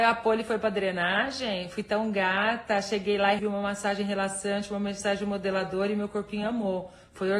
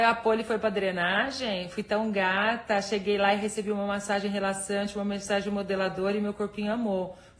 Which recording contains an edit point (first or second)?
first